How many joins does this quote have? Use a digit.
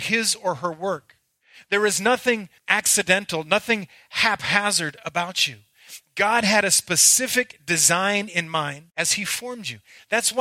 2